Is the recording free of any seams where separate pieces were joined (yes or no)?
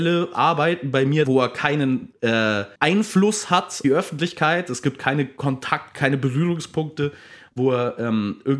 no